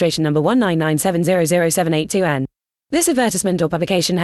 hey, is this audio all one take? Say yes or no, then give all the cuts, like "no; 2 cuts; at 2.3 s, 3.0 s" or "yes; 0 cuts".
yes; 0 cuts